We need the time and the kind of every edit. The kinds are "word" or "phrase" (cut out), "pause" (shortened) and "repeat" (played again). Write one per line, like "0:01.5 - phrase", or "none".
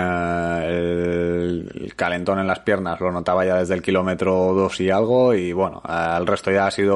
none